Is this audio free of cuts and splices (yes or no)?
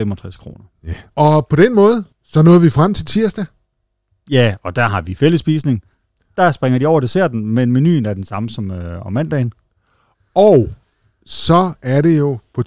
no